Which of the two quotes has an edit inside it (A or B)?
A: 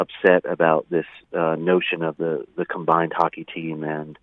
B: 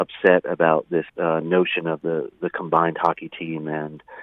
B